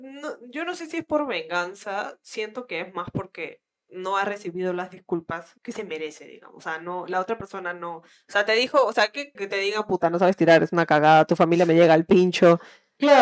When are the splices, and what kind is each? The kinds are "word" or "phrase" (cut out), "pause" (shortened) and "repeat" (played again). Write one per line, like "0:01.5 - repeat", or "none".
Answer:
0:05.6 - pause
0:09.3 - word